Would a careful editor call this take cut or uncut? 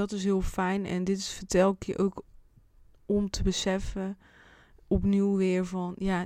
uncut